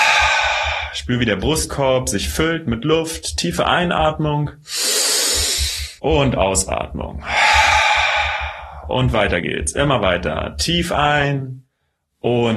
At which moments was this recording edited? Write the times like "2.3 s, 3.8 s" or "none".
6.0 s